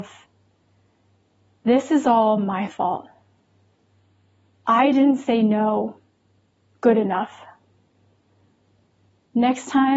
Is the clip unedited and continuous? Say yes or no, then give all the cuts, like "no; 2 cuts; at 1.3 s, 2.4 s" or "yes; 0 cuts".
yes; 0 cuts